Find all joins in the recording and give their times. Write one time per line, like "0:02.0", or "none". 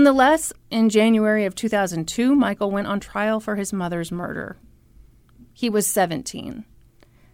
none